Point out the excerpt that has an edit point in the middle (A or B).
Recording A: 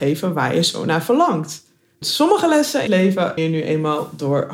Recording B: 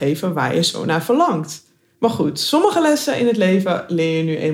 A